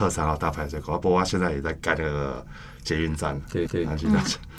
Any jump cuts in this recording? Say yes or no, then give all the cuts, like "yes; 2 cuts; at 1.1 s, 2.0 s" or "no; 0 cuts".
yes; 1 cut; at 3.7 s